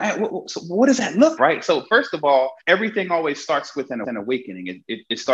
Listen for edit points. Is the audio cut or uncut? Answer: cut